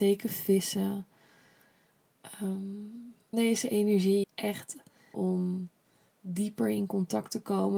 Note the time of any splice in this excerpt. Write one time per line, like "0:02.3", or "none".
0:03.3
0:04.2
0:05.1